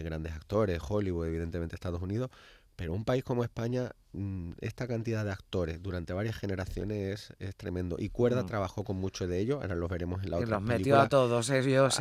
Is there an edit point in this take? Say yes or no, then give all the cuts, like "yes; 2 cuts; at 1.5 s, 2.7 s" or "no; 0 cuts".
no; 0 cuts